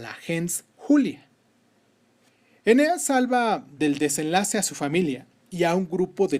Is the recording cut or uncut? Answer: uncut